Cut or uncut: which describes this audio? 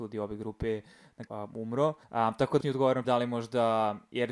cut